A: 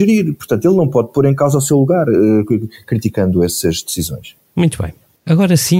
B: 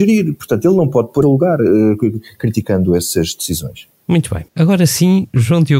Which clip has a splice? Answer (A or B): B